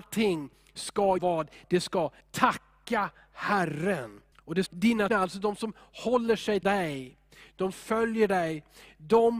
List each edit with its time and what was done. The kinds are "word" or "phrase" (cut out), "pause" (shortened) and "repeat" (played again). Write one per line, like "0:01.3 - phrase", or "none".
0:01.2 - word
0:02.2 - pause
0:04.3 - pause
0:04.7 - phrase
0:05.1 - word
0:06.6 - word
0:07.7 - word